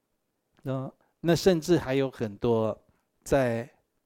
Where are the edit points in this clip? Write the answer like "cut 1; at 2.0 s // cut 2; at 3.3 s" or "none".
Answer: cut 1; at 1.0 s